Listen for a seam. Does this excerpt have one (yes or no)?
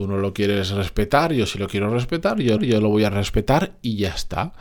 yes